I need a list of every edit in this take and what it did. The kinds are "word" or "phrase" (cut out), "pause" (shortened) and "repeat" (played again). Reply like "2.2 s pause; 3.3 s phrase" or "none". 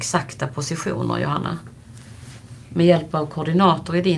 none